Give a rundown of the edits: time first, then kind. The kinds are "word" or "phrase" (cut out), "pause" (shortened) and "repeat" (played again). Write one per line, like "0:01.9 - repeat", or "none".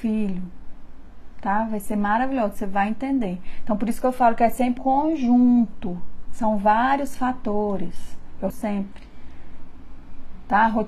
0:04.8 - word
0:08.5 - phrase